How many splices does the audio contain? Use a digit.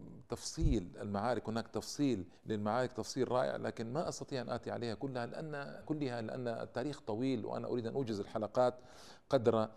2